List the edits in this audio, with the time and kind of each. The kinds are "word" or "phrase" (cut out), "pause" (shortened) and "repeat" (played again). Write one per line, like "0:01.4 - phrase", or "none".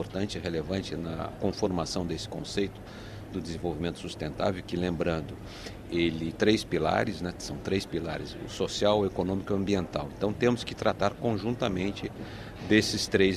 0:05.8 - word
0:06.3 - phrase